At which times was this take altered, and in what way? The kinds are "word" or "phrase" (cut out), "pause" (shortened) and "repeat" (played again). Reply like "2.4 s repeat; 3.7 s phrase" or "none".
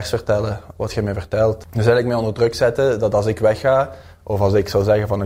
none